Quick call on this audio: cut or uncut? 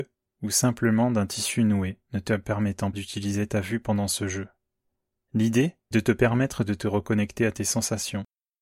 cut